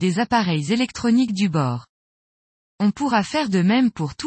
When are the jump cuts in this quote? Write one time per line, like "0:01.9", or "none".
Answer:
none